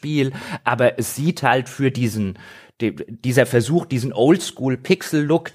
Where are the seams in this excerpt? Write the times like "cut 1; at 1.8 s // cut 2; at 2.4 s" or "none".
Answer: none